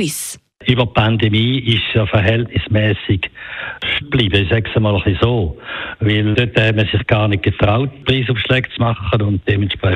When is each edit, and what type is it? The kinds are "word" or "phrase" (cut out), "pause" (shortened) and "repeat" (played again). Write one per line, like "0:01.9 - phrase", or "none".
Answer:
0:04.0 - word
0:06.3 - word